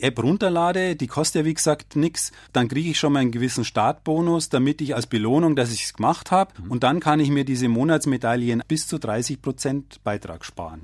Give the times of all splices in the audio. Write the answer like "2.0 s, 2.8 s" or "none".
8.6 s